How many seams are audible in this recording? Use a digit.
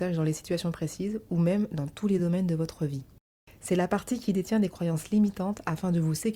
0